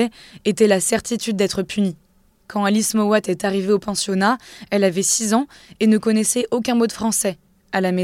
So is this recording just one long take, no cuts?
yes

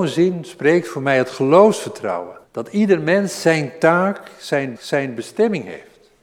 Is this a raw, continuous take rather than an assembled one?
no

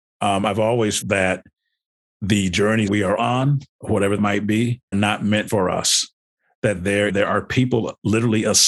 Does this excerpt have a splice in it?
yes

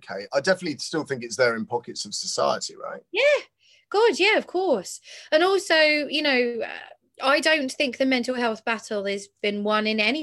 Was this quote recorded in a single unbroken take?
yes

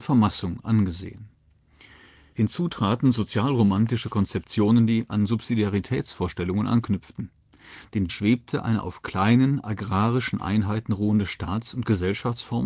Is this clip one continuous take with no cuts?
no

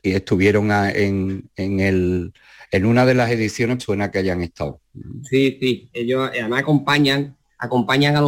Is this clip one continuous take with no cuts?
no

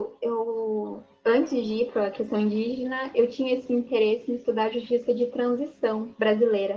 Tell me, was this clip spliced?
no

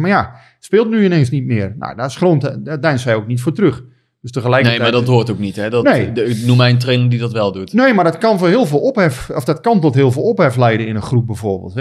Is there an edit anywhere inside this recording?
no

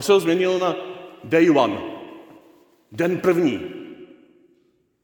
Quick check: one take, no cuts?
yes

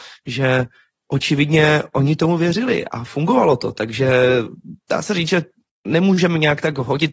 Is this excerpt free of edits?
yes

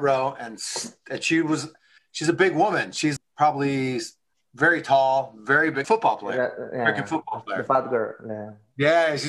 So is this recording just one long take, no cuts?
no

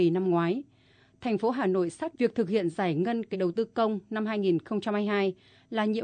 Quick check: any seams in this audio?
yes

